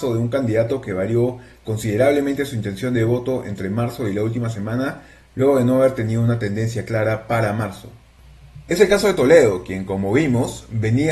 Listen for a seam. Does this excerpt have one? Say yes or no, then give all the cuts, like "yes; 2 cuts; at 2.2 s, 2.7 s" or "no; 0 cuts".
no; 0 cuts